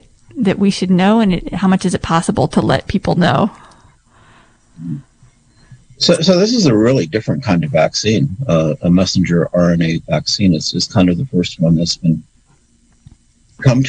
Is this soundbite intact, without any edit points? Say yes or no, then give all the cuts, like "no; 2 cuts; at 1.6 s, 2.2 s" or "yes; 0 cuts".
yes; 0 cuts